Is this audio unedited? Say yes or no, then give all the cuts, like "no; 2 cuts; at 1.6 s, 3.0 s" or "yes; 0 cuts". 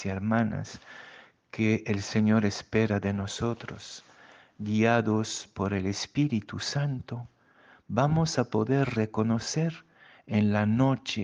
yes; 0 cuts